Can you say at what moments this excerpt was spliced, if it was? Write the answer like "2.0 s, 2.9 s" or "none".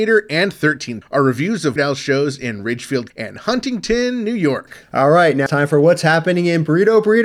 1.0 s, 1.8 s, 3.1 s, 5.5 s

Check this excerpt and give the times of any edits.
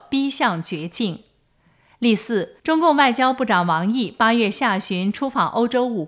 2.6 s

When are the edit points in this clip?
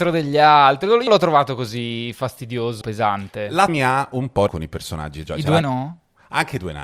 1.1 s, 2.8 s, 3.7 s, 4.5 s, 5.2 s, 5.6 s

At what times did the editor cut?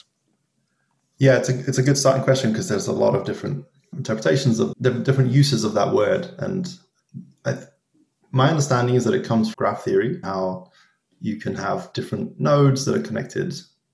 3.9 s, 4.7 s, 9.5 s, 10.2 s

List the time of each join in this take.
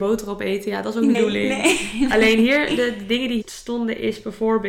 1.1 s, 3.4 s

